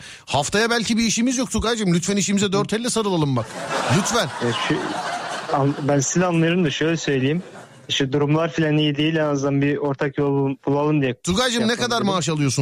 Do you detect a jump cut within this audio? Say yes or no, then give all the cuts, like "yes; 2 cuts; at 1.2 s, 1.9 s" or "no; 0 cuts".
no; 0 cuts